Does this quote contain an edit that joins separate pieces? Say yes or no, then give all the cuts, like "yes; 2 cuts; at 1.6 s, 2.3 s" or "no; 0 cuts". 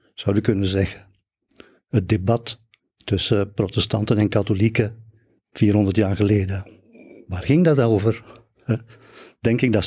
no; 0 cuts